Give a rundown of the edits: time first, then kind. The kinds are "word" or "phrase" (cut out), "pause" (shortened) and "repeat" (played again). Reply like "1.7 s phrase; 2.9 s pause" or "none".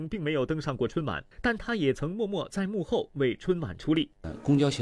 1.3 s pause